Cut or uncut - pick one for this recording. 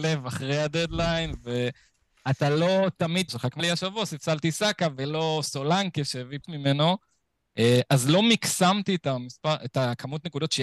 cut